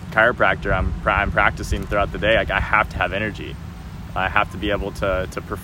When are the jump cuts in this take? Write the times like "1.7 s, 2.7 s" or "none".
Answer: none